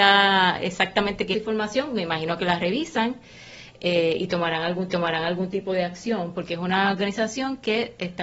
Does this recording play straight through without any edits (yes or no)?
no